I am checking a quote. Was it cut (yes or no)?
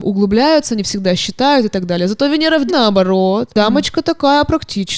yes